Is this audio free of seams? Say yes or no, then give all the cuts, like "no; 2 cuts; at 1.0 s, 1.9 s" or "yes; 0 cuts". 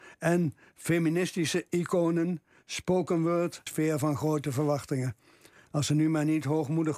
no; 1 cut; at 3.7 s